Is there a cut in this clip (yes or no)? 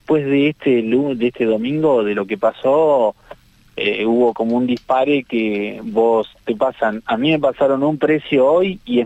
no